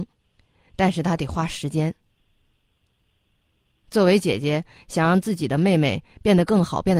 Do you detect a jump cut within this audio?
no; 0 cuts

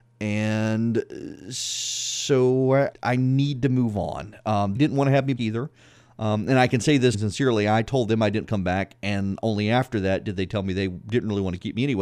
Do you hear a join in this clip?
yes; 5 cuts; at 2.9 s, 4.8 s, 5.4 s, 7.1 s, 8.4 s

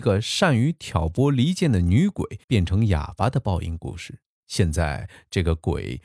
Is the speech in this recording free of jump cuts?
no; 2 cuts; at 2.4 s, 4.3 s

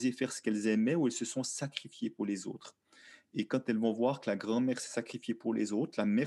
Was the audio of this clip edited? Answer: no; 0 cuts

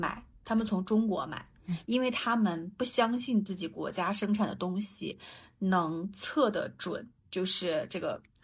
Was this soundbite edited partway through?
yes; 1 cut; at 7.2 s

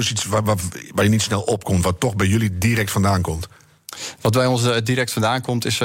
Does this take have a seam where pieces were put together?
no; 0 cuts

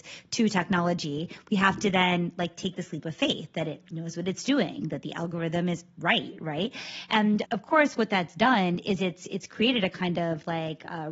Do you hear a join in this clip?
yes; 1 cut; at 7.4 s

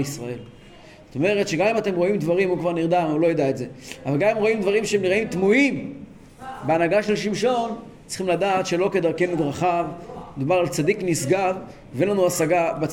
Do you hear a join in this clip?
no; 0 cuts

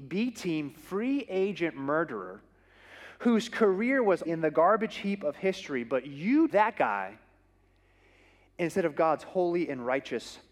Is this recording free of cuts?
no; 2 cuts; at 4.3 s, 6.5 s

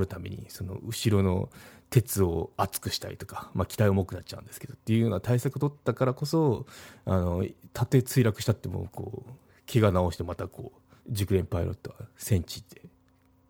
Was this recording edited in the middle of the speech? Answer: yes; 1 cut; at 11.0 s

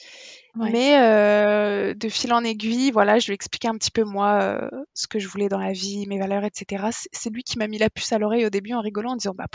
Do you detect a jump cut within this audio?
no; 0 cuts

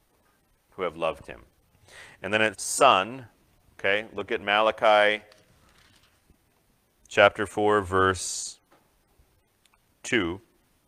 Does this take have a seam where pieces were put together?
yes; 1 cut; at 2.5 s

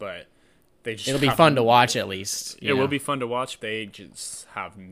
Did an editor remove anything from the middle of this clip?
yes; 1 cut; at 3.6 s

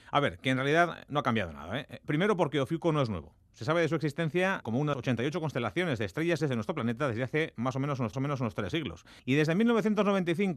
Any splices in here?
yes; 5 cuts; at 4.6 s, 4.9 s, 6.4 s, 8.1 s, 9.2 s

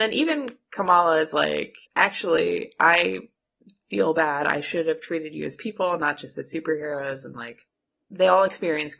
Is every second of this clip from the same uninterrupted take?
no; 1 cut; at 1.8 s

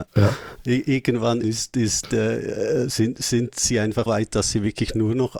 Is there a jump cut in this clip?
yes; 2 cuts; at 1.4 s, 4.1 s

